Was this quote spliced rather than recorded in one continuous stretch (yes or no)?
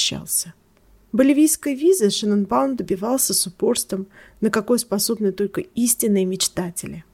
no